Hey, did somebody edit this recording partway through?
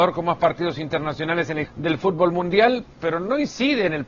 yes; 2 cuts; at 1.6 s, 2.9 s

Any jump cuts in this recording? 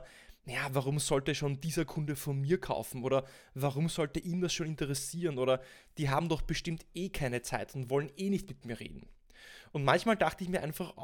no; 0 cuts

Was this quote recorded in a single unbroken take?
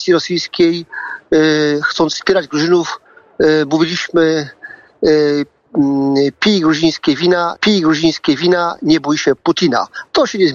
no; 1 cut; at 7.6 s

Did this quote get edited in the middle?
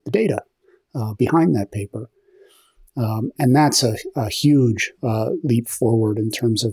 no; 0 cuts

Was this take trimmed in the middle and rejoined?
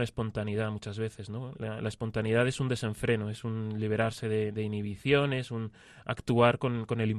no; 0 cuts

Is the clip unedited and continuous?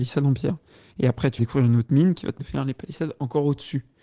no; 2 cuts; at 1.4 s, 2.4 s

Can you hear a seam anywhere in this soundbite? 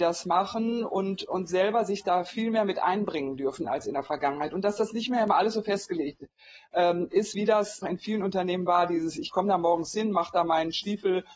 yes; 2 cuts; at 7.3 s, 7.8 s

